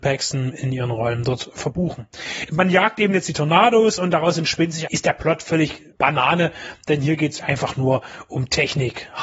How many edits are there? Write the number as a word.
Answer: three